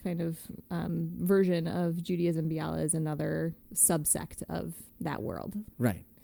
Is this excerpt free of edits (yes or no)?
no